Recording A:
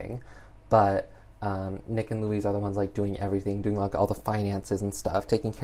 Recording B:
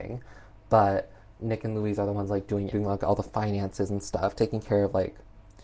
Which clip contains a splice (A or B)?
B